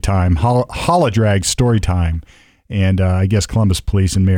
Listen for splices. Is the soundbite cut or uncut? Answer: uncut